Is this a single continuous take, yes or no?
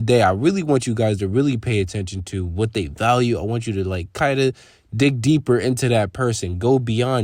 yes